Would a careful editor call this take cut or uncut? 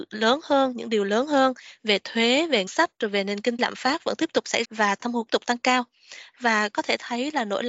cut